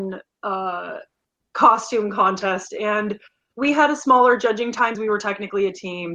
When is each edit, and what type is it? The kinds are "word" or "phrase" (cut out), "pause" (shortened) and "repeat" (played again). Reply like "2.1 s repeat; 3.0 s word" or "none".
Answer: 3.5 s word; 4.9 s word